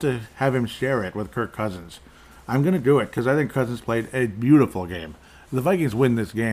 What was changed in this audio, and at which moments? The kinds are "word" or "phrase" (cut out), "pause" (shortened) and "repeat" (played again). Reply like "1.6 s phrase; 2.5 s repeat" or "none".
3.5 s word